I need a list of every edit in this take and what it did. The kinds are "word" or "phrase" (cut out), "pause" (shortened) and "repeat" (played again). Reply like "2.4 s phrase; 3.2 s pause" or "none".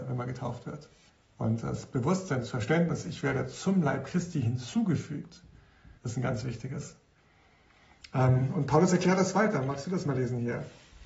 1.1 s pause; 6.0 s pause